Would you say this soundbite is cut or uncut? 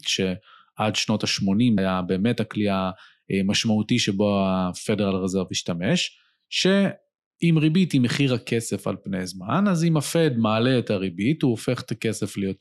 cut